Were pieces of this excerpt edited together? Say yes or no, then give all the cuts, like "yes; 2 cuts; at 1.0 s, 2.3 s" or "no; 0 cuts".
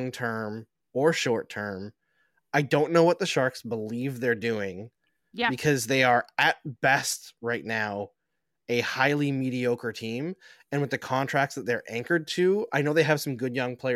no; 0 cuts